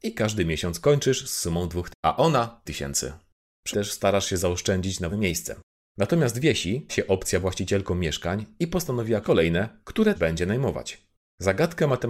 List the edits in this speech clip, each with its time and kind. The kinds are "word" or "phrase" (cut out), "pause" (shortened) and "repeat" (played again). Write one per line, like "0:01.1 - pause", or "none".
0:01.9 - word
0:02.7 - word
0:03.7 - word
0:05.1 - word
0:06.9 - word
0:07.4 - word
0:09.2 - word
0:10.1 - word